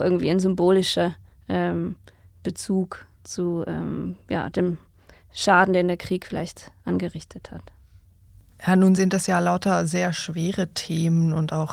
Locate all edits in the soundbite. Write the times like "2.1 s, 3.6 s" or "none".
none